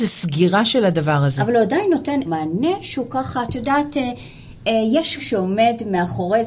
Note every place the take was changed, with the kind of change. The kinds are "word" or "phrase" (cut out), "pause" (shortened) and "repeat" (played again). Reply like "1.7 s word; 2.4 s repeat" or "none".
2.3 s word; 5.2 s word